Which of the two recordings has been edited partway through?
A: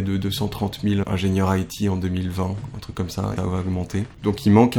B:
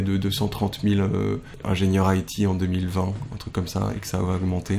A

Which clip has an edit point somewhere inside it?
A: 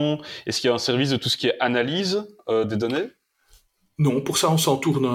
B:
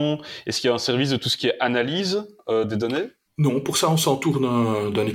B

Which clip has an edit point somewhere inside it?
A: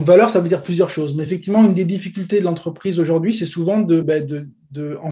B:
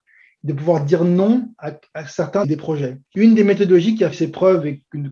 B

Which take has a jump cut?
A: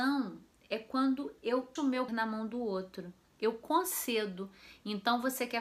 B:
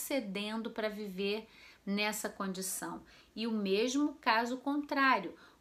A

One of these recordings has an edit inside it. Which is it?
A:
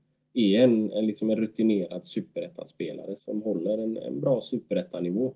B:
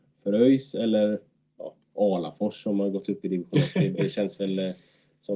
A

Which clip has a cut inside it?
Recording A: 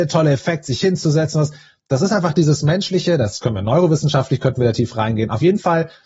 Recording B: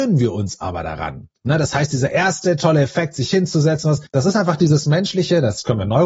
B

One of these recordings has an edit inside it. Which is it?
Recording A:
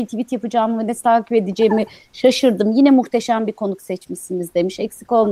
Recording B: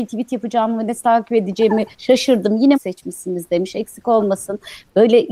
B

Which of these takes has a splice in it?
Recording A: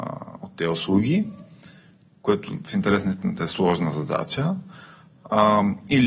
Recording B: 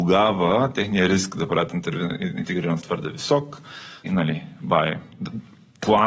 B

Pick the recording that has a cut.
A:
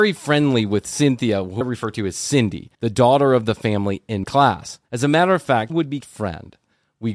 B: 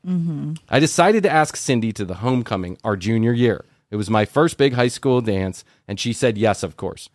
A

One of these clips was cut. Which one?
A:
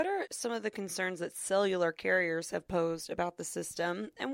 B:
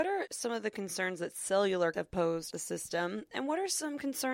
B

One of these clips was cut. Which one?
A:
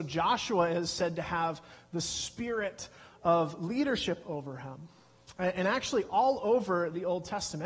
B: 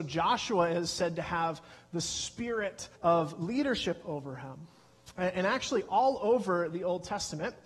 B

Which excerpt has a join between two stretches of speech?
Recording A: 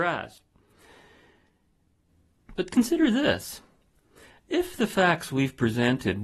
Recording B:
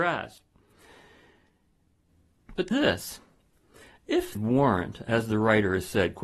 B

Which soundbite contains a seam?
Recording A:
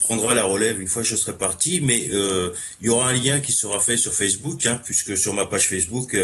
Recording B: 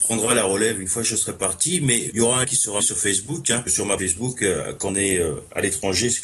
B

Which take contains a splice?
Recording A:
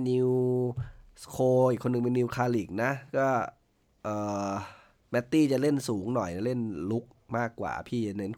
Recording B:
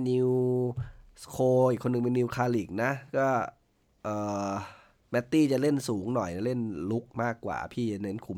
B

